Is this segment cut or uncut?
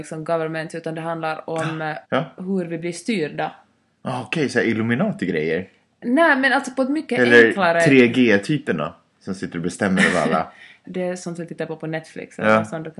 cut